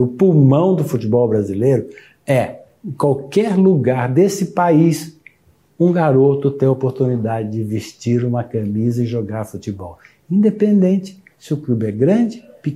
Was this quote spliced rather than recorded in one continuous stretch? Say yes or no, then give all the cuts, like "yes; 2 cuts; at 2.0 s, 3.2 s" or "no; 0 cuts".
no; 0 cuts